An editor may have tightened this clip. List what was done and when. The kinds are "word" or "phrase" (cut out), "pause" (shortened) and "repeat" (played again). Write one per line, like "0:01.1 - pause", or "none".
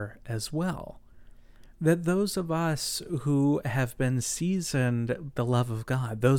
0:05.3 - word